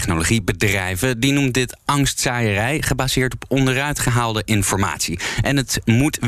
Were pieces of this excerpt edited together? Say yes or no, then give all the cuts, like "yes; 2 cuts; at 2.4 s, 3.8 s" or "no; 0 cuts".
no; 0 cuts